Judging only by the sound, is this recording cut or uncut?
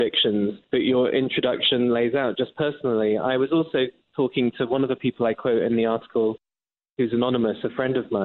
uncut